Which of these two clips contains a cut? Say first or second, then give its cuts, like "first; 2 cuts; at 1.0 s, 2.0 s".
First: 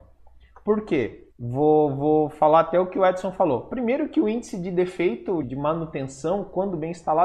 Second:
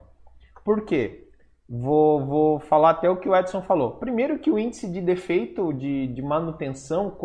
first; 2 cuts; at 1.3 s, 5.4 s